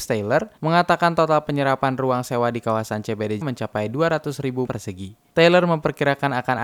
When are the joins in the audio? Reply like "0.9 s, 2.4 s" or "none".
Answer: 3.4 s, 4.7 s, 5.3 s